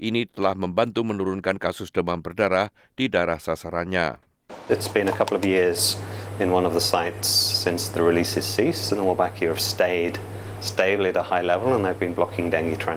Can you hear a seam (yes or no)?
no